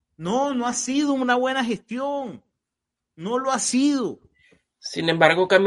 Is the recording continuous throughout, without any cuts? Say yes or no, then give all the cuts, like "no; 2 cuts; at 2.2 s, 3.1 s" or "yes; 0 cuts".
yes; 0 cuts